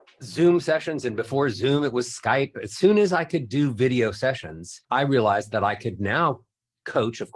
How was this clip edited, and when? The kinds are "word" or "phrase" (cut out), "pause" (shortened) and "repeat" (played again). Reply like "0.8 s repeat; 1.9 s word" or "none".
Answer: 4.8 s pause